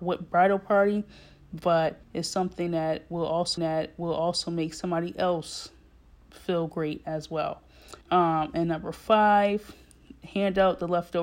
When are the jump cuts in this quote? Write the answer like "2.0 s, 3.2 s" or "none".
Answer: 2.0 s, 3.6 s, 8.0 s